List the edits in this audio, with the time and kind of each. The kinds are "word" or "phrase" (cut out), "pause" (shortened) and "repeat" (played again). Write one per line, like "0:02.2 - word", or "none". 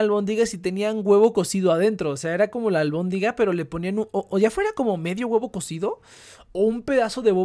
none